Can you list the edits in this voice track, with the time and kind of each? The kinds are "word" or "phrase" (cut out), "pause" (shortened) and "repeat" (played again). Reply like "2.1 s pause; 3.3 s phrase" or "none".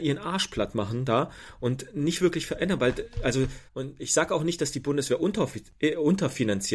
3.7 s pause